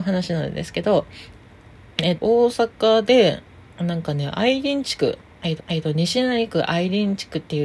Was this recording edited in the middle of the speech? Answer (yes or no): yes